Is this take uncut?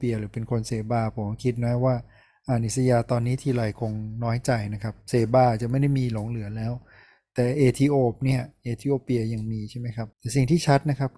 no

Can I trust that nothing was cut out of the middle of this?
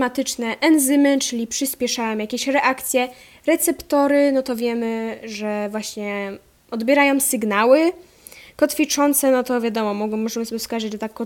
yes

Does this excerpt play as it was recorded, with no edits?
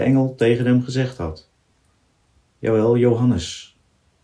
yes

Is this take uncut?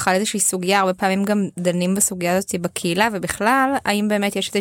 yes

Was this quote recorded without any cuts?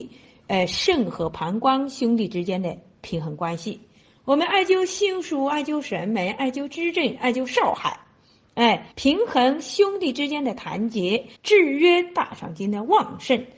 no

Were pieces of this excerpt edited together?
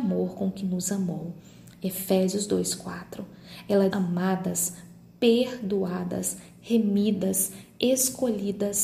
yes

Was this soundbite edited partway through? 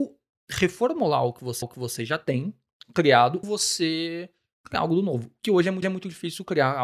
yes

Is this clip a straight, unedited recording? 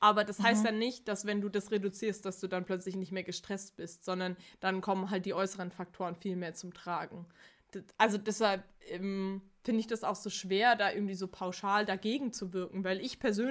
yes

